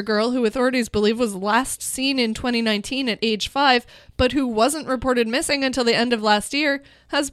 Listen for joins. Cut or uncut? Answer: uncut